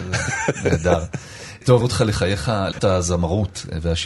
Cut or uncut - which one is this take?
cut